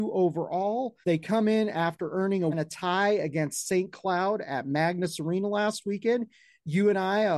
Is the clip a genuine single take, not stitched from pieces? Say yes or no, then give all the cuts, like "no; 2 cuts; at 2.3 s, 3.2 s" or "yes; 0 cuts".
no; 2 cuts; at 1.0 s, 2.5 s